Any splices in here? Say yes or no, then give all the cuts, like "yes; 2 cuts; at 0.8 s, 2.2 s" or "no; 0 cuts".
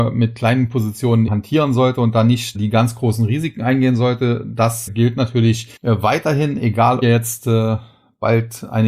yes; 5 cuts; at 1.3 s, 2.5 s, 4.9 s, 5.8 s, 7.0 s